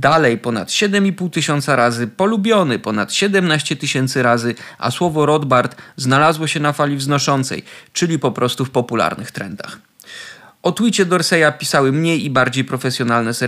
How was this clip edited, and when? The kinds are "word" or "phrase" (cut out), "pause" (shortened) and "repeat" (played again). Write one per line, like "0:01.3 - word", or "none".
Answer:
none